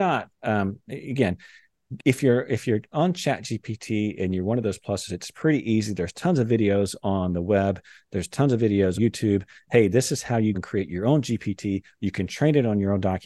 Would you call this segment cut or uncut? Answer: cut